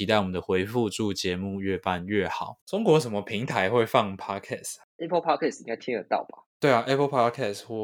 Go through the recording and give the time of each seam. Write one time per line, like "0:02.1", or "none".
0:02.6
0:06.5